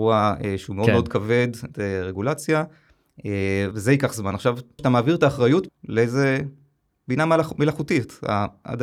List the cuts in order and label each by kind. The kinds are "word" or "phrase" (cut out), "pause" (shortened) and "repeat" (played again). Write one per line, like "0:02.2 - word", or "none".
0:01.7 - word
0:03.7 - word
0:04.8 - word
0:05.7 - word